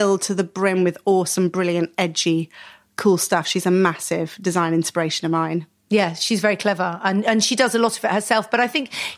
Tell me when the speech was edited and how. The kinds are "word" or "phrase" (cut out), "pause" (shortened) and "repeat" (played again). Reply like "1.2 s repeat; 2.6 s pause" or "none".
none